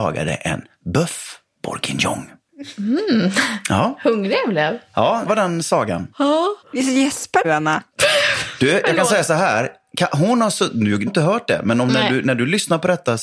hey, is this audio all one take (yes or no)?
no